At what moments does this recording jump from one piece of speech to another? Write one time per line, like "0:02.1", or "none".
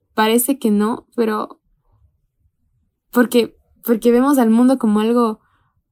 none